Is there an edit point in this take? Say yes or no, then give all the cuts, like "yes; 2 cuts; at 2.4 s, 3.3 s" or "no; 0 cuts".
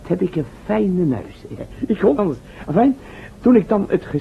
yes; 1 cut; at 2.2 s